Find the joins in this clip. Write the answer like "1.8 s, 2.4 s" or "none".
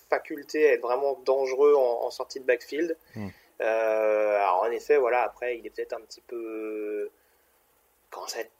none